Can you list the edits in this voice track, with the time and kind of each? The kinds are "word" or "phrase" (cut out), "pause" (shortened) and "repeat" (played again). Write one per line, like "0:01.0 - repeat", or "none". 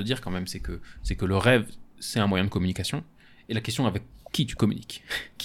none